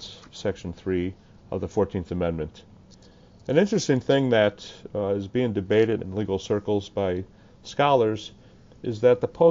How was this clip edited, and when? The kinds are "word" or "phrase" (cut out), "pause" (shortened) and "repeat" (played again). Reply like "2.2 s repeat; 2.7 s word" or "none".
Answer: 6.0 s word

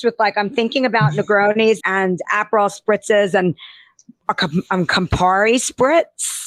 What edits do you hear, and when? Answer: 1.8 s word

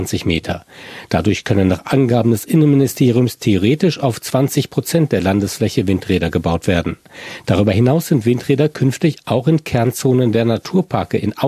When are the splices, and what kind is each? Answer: none

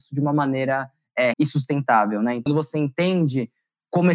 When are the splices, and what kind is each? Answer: 1.3 s word; 2.5 s word

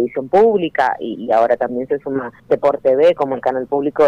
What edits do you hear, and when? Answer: 2.4 s pause

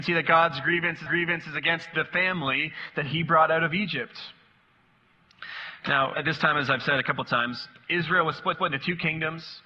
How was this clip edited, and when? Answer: 1.1 s repeat; 6.1 s word; 8.5 s repeat

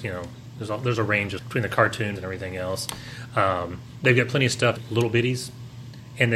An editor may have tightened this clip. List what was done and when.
1.4 s word; 2.2 s phrase; 4.8 s word

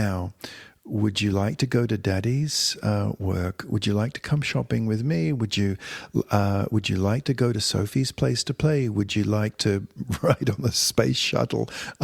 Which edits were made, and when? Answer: none

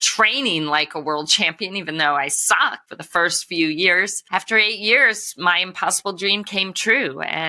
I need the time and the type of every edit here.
none

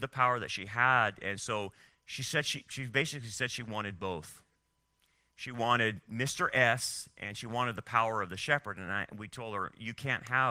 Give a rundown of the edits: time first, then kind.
none

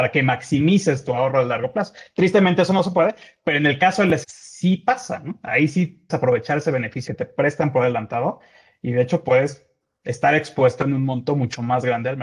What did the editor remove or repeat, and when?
4.2 s word; 6.1 s word; 7.1 s word

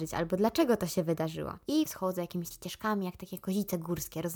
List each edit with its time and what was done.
1.9 s phrase; 2.5 s word

